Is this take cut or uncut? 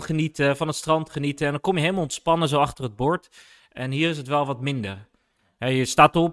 uncut